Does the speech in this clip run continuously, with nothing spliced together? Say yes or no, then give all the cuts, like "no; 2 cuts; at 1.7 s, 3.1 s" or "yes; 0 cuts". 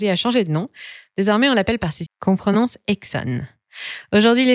no; 1 cut; at 2.1 s